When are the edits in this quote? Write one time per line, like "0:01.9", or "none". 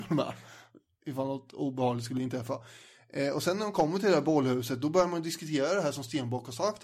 none